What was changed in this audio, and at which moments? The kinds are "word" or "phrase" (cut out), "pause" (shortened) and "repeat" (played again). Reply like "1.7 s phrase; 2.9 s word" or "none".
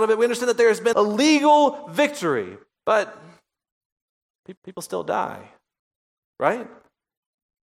0.9 s word; 4.6 s repeat; 5.8 s pause